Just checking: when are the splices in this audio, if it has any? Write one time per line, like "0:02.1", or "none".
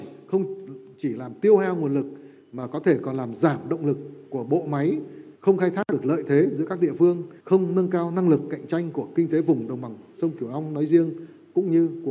0:05.4
0:07.4